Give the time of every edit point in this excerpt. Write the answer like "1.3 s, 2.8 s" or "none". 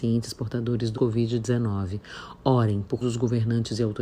0.9 s, 3.0 s